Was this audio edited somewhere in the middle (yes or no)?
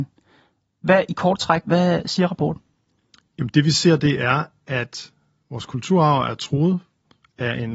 no